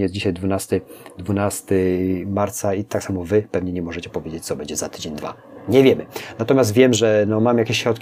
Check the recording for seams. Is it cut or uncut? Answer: cut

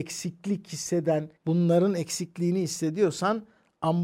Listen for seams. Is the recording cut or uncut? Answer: cut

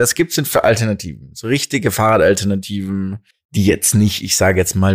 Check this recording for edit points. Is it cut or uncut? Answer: cut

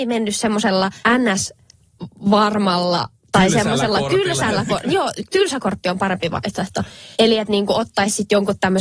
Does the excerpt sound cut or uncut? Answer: cut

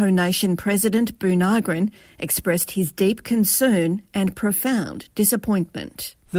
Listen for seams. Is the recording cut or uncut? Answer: uncut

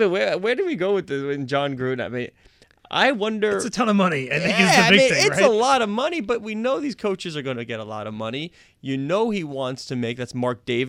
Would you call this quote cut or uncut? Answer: uncut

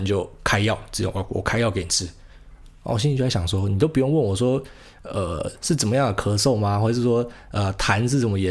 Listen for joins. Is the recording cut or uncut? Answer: uncut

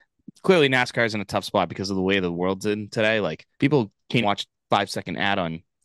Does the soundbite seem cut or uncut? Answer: cut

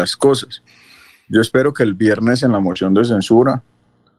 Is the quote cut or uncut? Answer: uncut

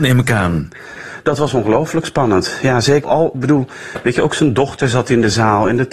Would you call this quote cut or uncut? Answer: cut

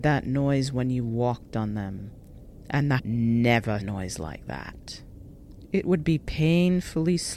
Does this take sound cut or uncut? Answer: cut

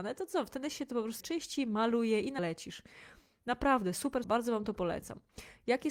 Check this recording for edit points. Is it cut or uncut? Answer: cut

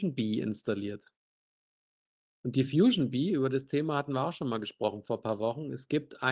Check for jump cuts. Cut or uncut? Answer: uncut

